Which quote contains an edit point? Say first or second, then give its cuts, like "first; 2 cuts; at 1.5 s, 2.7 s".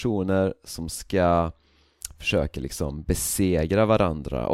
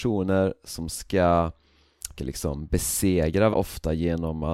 second; 2 cuts; at 2.2 s, 3.5 s